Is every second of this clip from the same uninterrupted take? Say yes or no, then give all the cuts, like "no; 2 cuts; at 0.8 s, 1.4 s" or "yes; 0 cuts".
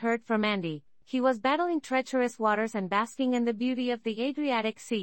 yes; 0 cuts